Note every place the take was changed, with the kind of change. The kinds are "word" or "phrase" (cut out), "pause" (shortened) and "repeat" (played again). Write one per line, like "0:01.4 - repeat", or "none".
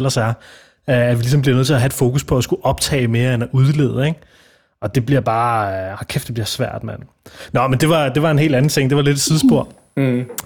none

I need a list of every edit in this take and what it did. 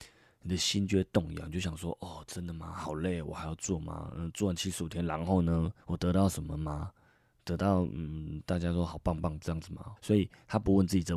0:05.8 - pause
0:10.0 - word

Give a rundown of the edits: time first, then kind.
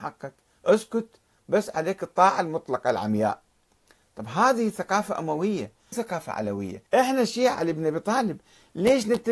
0:05.9 - phrase
0:06.9 - pause
0:07.5 - phrase

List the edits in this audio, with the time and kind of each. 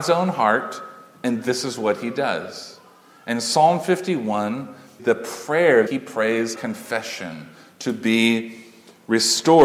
0:05.0 - word
0:05.9 - word
0:06.6 - word

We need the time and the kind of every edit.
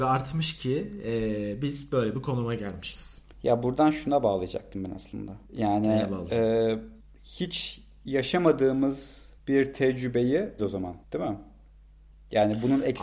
0:03.3 - pause
0:05.5 - pause
0:07.0 - pause
0:09.4 - pause
0:10.6 - word
0:11.0 - pause

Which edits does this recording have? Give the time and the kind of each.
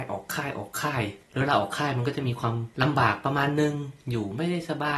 0:01.2 - pause
0:02.7 - pause

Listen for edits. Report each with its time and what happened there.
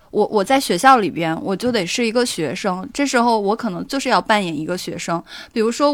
none

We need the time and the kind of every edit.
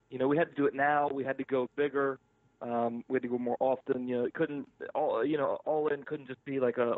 none

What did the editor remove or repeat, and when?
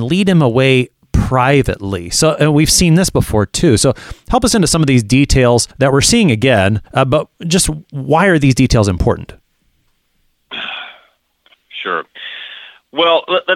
0:05.7 - pause
0:06.9 - pause
0:07.3 - pause

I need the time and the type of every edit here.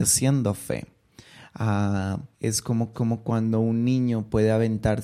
0:02.3 - pause
0:02.9 - repeat

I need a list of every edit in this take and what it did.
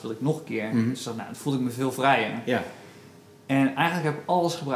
none

